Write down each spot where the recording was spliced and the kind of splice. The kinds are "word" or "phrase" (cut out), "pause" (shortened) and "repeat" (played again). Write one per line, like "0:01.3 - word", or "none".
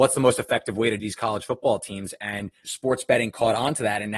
0:01.0 - word
0:02.6 - word